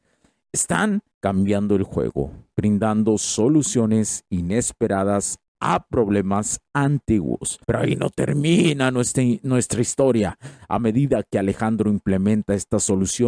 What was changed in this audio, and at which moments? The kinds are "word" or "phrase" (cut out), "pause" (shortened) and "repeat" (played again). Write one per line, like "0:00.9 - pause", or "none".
0:01.1 - pause
0:07.6 - pause